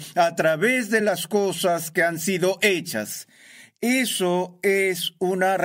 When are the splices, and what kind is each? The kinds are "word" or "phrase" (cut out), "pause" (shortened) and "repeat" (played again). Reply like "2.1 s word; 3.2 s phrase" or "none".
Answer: none

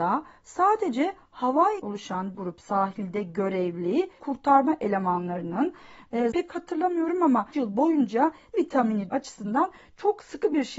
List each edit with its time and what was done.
1.8 s word; 2.3 s word; 4.2 s word; 6.3 s word; 7.5 s word; 8.5 s word; 9.1 s word

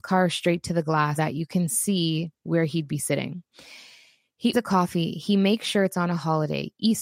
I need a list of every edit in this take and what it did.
1.2 s word; 4.5 s word

